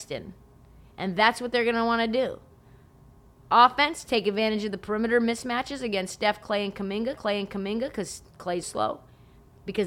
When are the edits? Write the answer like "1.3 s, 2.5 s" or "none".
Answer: 7.1 s, 8.6 s

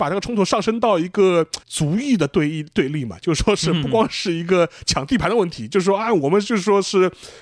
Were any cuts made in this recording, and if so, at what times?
1.6 s

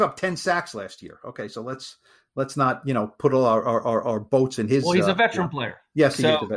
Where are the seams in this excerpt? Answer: none

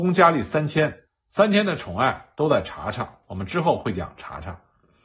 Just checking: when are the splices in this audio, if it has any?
3.2 s

